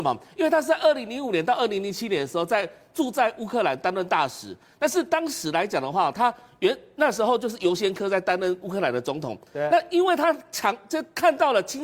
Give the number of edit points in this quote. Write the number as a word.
zero